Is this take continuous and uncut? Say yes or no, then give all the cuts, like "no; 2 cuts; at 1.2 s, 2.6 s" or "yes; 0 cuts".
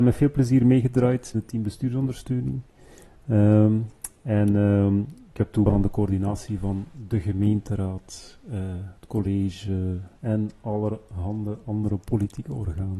no; 3 cuts; at 1.3 s, 5.7 s, 10.2 s